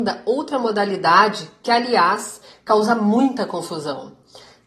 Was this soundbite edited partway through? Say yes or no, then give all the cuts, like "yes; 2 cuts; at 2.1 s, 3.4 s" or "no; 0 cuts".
no; 0 cuts